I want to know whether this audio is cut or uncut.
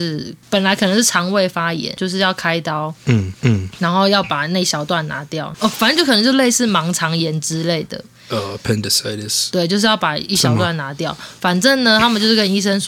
cut